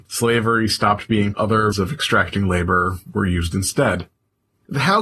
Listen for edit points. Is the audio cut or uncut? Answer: cut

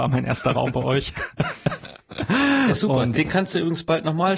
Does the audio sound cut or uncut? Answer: cut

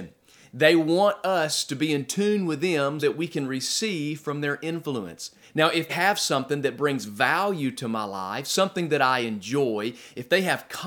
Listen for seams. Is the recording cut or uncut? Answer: cut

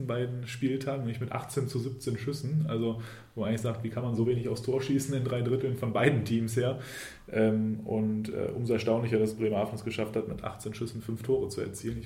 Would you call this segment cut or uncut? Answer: uncut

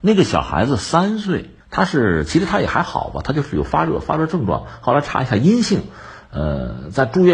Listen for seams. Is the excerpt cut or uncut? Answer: cut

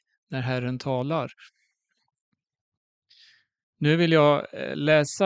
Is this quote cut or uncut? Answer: uncut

